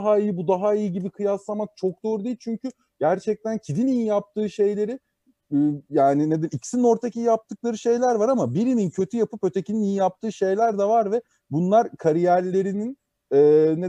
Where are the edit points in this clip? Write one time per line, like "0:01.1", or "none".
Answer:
none